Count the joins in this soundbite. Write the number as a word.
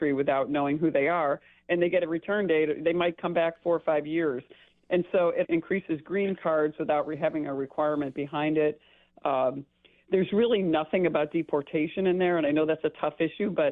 one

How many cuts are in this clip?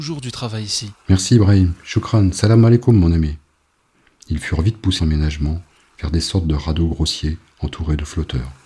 one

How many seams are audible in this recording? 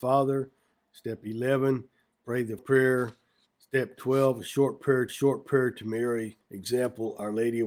three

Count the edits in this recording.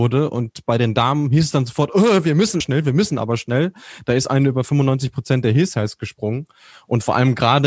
one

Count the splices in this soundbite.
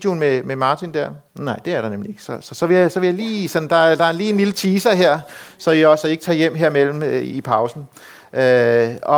one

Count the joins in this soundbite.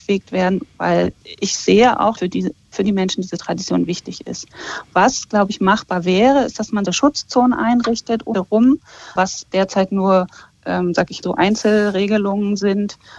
six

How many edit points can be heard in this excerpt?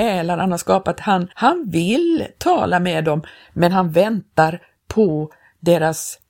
one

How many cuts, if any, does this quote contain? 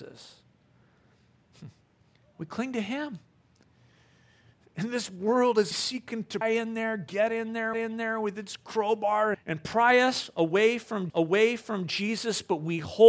five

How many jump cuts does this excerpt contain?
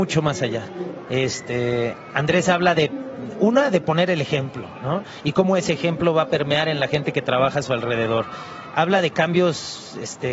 zero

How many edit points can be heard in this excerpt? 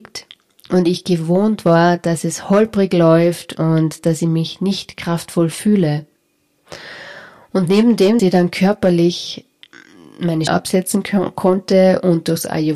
two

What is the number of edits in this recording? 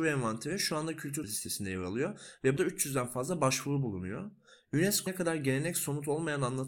three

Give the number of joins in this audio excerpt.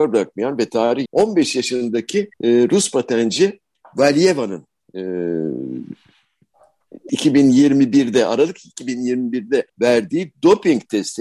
five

